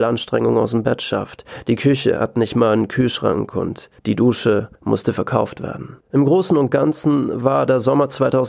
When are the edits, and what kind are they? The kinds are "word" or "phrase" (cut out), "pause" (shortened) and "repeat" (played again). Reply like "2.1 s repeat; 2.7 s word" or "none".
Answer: 4.0 s pause; 4.7 s pause; 6.0 s pause